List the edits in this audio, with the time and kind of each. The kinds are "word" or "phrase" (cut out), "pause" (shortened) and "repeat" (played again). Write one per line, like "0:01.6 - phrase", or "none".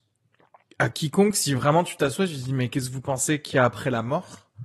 none